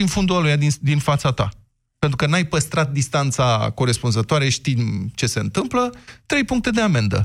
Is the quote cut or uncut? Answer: uncut